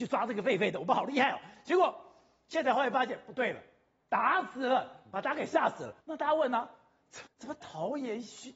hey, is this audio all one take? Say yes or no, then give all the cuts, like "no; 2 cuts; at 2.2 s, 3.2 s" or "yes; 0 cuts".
no; 2 cuts; at 6.0 s, 7.3 s